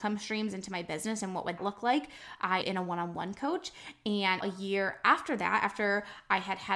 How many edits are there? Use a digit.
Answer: 3